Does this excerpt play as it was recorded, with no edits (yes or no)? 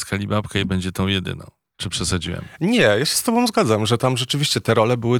yes